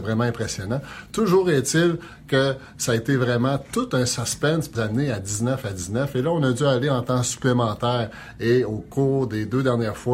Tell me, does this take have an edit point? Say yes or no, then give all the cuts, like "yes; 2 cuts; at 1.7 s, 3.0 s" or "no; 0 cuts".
yes; 1 cut; at 4.7 s